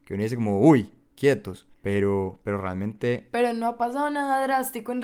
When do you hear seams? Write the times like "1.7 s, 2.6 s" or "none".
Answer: 1.7 s